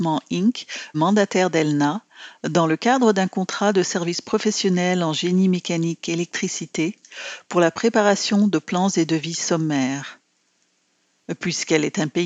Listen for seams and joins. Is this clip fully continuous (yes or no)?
no